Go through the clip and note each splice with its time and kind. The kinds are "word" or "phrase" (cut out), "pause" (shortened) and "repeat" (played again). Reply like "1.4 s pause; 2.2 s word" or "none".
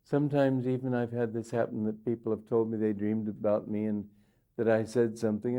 none